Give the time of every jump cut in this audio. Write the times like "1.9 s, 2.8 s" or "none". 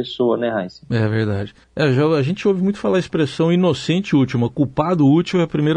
1.6 s